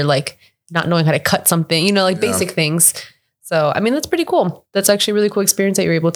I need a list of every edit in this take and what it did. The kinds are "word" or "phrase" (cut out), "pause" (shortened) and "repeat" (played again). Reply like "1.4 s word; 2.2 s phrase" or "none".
none